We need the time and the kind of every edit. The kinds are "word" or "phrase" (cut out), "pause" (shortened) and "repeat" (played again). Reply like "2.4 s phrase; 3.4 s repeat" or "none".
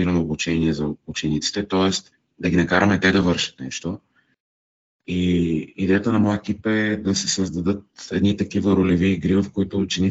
none